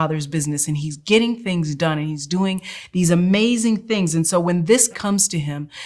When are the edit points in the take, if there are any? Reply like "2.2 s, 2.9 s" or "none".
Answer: 4.9 s